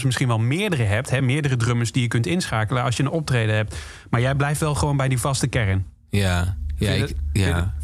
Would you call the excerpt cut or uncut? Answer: uncut